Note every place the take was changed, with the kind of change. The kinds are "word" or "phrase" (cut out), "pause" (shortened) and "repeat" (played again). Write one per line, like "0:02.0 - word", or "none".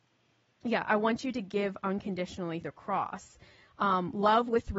0:02.6 - word